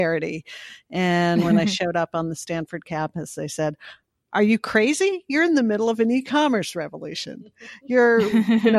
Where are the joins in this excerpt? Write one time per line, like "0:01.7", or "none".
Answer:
none